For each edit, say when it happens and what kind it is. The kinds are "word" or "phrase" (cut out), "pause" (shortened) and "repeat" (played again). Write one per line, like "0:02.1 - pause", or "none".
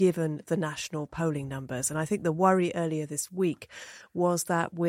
none